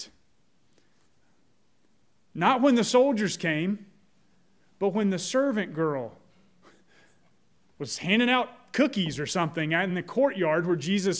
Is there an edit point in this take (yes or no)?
no